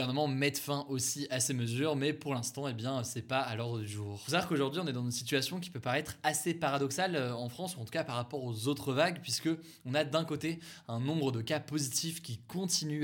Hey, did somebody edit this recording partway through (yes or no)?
no